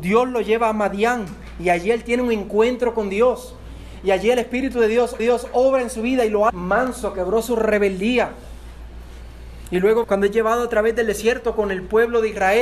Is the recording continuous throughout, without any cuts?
no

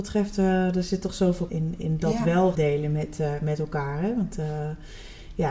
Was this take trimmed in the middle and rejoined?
yes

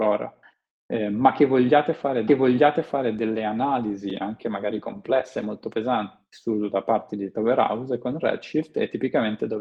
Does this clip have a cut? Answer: yes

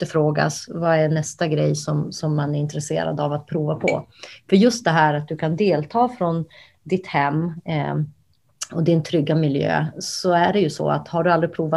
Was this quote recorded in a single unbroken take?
yes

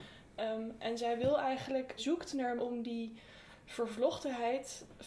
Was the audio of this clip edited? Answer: yes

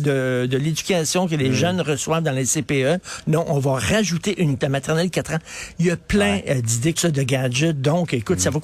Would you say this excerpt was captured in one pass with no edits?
no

